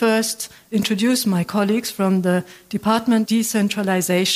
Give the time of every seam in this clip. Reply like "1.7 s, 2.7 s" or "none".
3.3 s